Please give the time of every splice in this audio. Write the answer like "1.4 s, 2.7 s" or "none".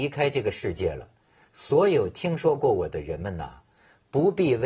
none